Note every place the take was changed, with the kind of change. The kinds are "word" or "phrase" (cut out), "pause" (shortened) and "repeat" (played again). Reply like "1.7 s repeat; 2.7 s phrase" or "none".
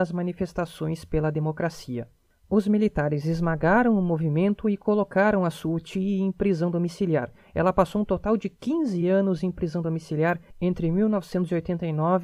none